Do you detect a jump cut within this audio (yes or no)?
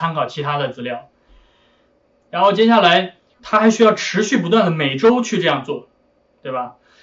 yes